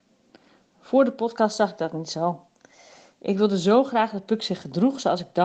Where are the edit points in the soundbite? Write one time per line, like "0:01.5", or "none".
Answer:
none